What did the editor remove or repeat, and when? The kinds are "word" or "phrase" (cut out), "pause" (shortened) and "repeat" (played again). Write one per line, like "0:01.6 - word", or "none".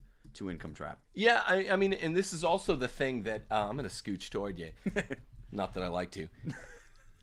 0:01.0 - pause